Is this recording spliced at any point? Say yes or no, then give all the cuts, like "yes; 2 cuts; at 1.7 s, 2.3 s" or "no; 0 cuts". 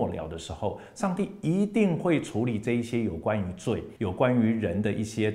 yes; 1 cut; at 4.0 s